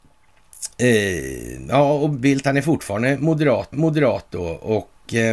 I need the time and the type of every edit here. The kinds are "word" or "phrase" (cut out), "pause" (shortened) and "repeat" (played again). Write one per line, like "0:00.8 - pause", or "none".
0:03.7 - repeat